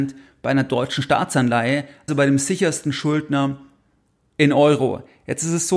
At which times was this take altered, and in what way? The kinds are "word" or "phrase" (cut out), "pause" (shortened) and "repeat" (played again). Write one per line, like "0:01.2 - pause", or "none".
0:02.1 - word